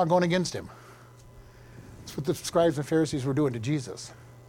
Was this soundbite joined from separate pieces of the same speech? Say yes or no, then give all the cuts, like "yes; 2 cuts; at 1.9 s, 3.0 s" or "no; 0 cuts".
no; 0 cuts